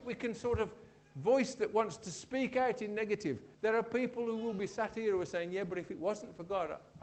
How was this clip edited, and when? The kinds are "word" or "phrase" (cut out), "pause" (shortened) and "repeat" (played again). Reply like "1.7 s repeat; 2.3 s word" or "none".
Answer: 3.5 s pause